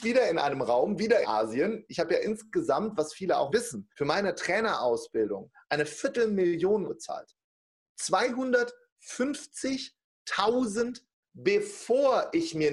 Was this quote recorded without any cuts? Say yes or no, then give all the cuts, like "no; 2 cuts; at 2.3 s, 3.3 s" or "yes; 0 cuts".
no; 5 cuts; at 1.2 s, 3.5 s, 3.9 s, 6.9 s, 11.2 s